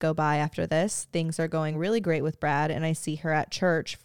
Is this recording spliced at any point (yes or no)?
no